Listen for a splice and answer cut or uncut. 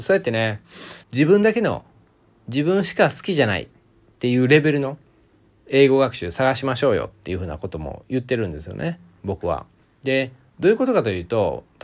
cut